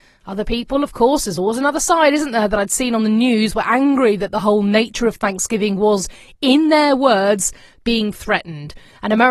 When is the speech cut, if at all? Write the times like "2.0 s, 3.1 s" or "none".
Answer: none